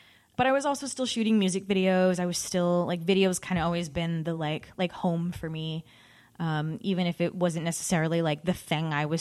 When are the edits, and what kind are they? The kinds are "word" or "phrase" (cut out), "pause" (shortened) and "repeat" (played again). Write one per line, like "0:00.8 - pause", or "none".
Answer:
none